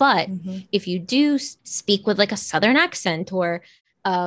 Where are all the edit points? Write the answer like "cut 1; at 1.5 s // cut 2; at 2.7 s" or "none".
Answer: cut 1; at 1.6 s